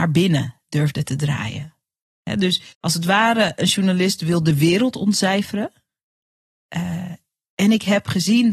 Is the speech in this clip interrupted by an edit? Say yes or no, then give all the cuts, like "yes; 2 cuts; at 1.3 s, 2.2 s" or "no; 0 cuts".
yes; 1 cut; at 2.7 s